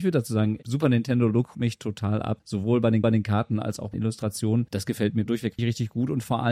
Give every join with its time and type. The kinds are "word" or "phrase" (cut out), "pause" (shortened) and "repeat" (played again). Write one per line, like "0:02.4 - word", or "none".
0:01.5 - word
0:03.0 - repeat
0:03.9 - phrase
0:05.6 - word